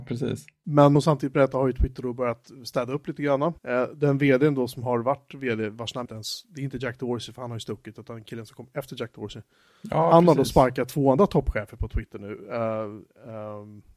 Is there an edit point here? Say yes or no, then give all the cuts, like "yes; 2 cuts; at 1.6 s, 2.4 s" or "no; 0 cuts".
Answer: yes; 3 cuts; at 0.9 s, 3.6 s, 6.0 s